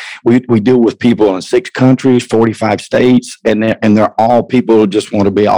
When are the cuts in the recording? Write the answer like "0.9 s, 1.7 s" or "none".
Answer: none